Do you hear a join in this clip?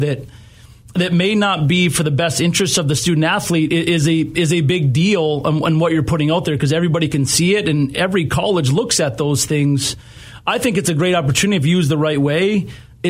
no; 0 cuts

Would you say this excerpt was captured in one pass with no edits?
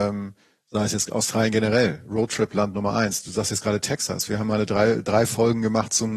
yes; 0 cuts

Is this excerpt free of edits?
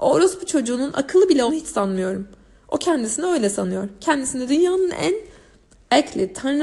no; 1 cut; at 1.5 s

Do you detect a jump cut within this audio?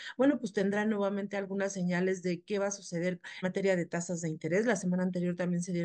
yes; 1 cut; at 3.4 s

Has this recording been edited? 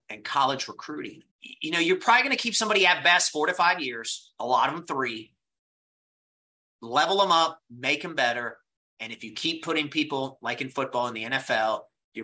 yes; 1 cut; at 1.3 s

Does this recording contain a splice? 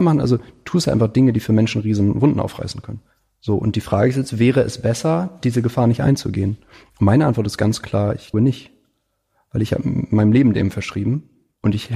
yes; 1 cut; at 8.3 s

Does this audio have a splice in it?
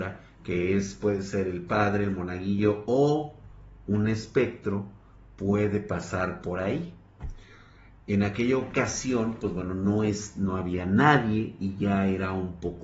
no; 0 cuts

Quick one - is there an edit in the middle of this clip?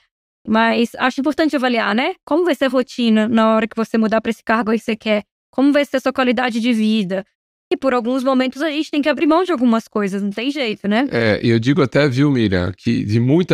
no; 0 cuts

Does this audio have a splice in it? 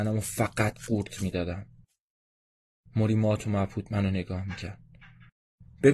no; 0 cuts

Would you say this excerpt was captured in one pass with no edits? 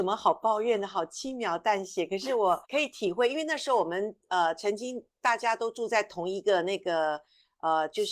no; 1 cut; at 2.6 s

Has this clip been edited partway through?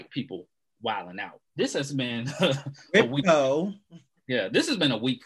yes; 1 cut; at 1.5 s

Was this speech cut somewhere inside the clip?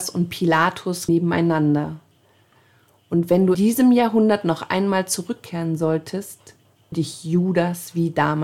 yes; 3 cuts; at 1.1 s, 3.5 s, 6.9 s

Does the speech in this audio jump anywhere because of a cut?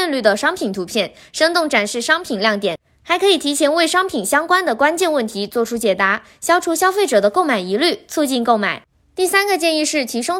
no; 0 cuts

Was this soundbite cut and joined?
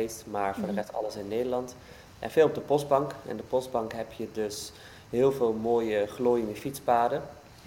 no; 0 cuts

